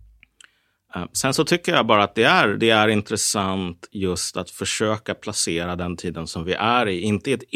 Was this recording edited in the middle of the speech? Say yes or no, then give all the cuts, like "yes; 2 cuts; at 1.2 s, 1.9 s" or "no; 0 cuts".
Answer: no; 0 cuts